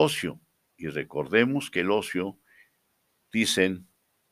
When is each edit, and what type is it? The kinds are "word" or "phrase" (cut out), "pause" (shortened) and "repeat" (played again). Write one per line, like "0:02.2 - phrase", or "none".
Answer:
none